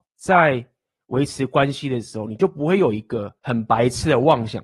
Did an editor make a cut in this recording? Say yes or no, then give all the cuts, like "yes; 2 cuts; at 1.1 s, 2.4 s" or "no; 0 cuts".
yes; 1 cut; at 3.4 s